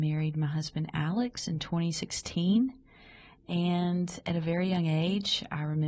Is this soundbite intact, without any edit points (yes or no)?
yes